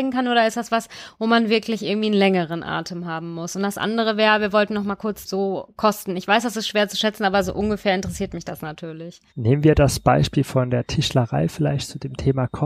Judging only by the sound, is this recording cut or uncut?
cut